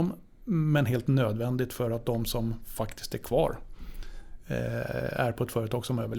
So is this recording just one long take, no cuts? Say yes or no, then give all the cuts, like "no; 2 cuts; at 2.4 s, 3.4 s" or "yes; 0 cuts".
yes; 0 cuts